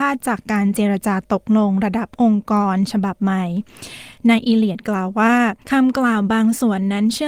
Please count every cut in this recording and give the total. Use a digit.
1